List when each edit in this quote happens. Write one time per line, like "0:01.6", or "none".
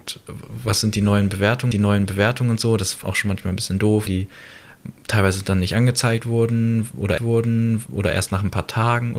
0:01.7
0:03.0
0:04.1
0:07.2